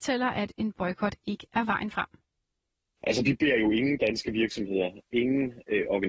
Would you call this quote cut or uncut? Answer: uncut